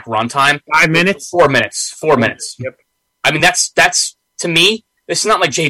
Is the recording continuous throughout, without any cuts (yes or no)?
yes